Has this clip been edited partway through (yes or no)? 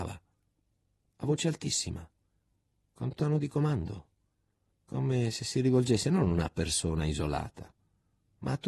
no